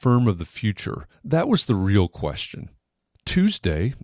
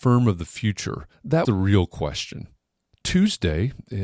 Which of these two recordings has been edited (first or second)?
second